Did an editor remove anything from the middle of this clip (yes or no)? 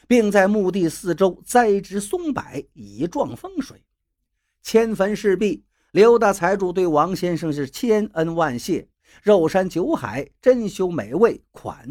no